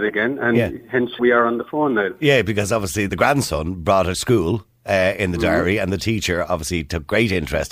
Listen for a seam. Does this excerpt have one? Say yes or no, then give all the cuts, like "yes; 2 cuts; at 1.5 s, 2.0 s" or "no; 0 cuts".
yes; 3 cuts; at 1.2 s, 3.1 s, 4.1 s